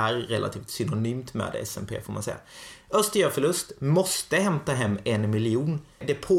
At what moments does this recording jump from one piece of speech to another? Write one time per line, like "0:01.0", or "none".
none